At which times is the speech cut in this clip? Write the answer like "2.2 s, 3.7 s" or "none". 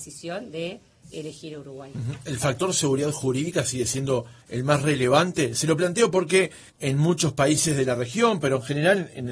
4.4 s, 6.7 s